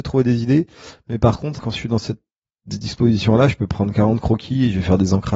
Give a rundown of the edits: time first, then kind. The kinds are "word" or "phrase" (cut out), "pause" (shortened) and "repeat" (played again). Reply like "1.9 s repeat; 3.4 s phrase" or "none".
1.6 s word